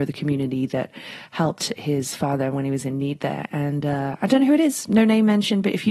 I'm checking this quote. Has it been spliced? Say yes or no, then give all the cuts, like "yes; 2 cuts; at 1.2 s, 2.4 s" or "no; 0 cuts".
no; 0 cuts